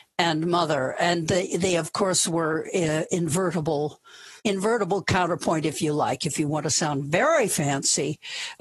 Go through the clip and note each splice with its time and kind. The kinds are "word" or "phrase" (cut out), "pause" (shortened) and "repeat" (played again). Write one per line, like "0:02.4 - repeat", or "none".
0:04.4 - pause